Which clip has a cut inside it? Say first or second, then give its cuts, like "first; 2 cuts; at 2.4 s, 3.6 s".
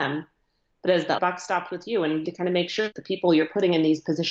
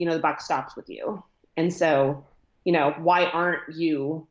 first; 3 cuts; at 1.2 s, 2.2 s, 3.0 s